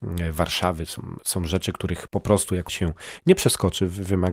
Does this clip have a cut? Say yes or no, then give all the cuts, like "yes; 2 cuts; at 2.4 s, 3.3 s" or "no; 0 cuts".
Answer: yes; 2 cuts; at 2.1 s, 2.7 s